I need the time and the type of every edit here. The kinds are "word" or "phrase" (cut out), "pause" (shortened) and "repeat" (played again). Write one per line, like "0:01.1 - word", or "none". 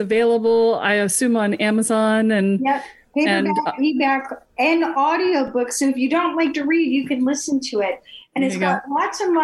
none